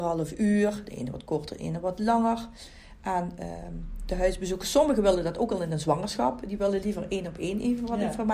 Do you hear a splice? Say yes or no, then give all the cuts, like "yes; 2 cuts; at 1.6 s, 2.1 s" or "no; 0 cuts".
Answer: no; 0 cuts